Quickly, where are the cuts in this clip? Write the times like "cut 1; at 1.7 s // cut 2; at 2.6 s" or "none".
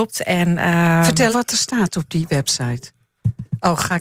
cut 1; at 1.3 s

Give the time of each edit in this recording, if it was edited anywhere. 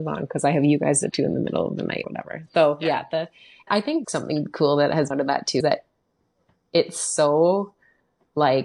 cut 1; at 1.1 s // cut 2; at 2.0 s // cut 3; at 3.7 s // cut 4; at 4.0 s // cut 5; at 5.1 s // cut 6; at 5.6 s

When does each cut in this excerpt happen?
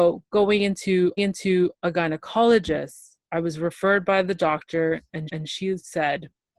cut 1; at 1.2 s // cut 2; at 5.3 s

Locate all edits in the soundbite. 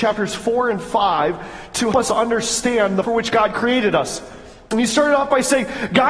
cut 1; at 1.9 s // cut 2; at 3.0 s

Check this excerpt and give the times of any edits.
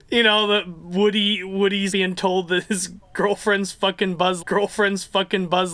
cut 1; at 1.9 s // cut 2; at 4.4 s

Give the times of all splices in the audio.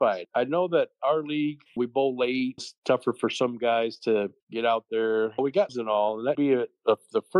cut 1; at 1.7 s // cut 2; at 2.6 s // cut 3; at 5.7 s // cut 4; at 6.3 s

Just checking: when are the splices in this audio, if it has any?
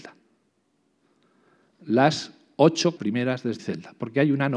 cut 1; at 3.0 s // cut 2; at 3.6 s

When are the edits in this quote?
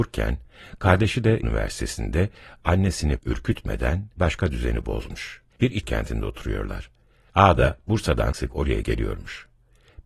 cut 1; at 1.4 s // cut 2; at 3.2 s // cut 3; at 4.2 s // cut 4; at 5.5 s // cut 5; at 5.8 s // cut 6; at 8.3 s // cut 7; at 8.8 s

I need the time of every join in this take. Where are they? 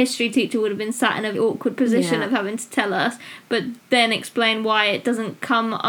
cut 1; at 1.3 s // cut 2; at 3.8 s

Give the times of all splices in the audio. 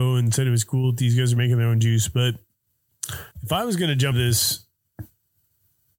cut 1; at 3.3 s // cut 2; at 4.1 s

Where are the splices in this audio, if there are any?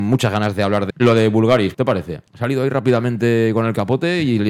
cut 1; at 0.9 s // cut 2; at 1.7 s // cut 3; at 2.3 s

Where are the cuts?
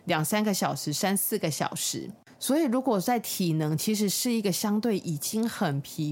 none

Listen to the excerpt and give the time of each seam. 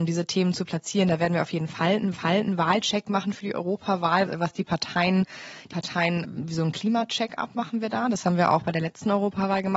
cut 1; at 2.1 s // cut 2; at 4.3 s // cut 3; at 5.7 s // cut 4; at 6.2 s

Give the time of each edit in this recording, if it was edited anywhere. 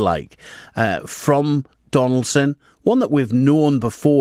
none

